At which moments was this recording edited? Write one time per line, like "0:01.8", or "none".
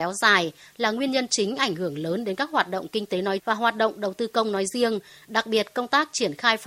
0:03.4